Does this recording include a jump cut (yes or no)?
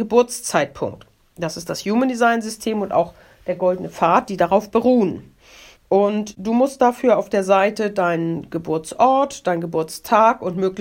no